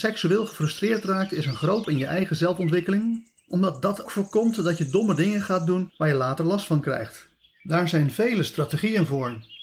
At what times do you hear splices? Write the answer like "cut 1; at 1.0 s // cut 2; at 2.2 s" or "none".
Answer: cut 1; at 1.8 s // cut 2; at 4.1 s